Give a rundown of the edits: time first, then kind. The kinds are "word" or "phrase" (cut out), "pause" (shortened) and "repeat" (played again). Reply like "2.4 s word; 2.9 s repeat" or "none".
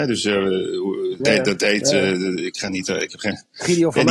1.2 s word

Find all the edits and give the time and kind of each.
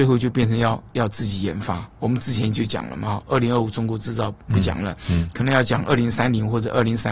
4.4 s pause

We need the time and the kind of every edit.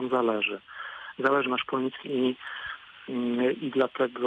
1.4 s word; 2.0 s word

